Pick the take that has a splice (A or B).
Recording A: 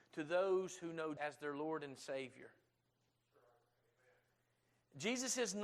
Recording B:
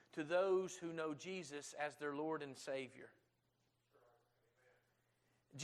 A